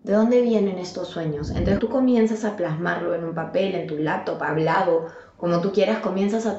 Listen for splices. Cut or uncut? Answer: cut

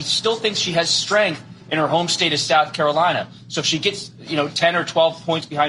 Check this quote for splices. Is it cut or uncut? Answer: uncut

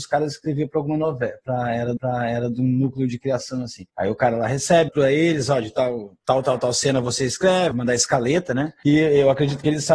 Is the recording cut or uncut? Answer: cut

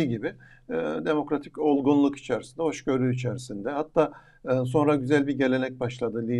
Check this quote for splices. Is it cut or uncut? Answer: uncut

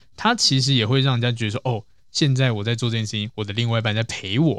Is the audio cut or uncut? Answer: uncut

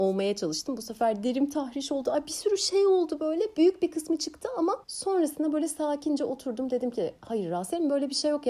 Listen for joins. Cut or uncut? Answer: cut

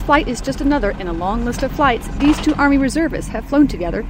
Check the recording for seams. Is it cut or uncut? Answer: uncut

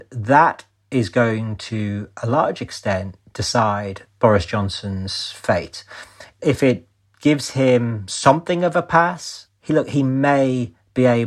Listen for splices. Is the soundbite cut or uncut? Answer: uncut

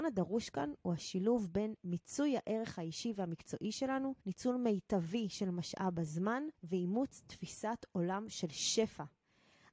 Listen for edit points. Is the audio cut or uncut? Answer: cut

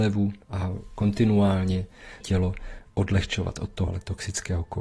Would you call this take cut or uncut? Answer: cut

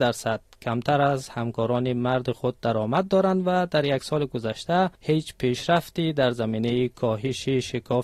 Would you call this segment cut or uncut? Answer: cut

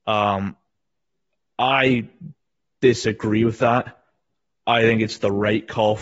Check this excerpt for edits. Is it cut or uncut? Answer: uncut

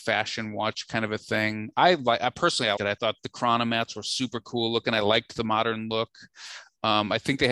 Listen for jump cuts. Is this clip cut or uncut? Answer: cut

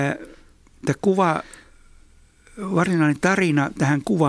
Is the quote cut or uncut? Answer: uncut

